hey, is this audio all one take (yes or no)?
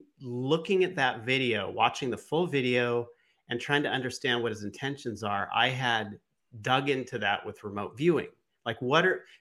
yes